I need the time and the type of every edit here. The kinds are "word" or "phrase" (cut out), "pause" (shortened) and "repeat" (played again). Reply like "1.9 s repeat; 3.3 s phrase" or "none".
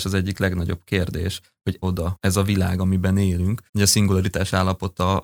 1.8 s word; 3.7 s pause

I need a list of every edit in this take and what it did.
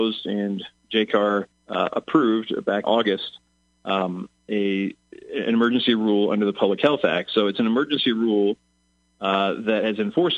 1.5 s pause; 2.8 s phrase

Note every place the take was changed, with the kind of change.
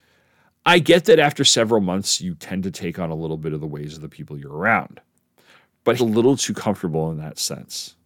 6.0 s word

